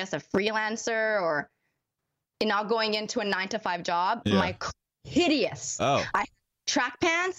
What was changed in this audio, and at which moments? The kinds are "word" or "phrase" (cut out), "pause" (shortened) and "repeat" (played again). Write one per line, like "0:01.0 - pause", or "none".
0:04.9 - phrase